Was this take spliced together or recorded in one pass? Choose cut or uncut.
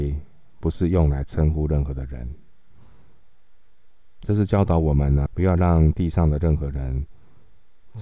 cut